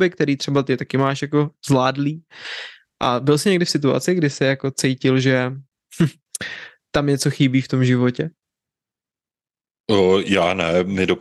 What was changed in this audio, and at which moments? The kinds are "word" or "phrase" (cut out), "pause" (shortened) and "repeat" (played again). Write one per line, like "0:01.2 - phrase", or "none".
none